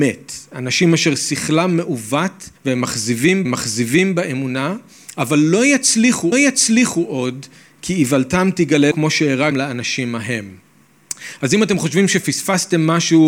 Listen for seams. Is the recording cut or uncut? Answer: cut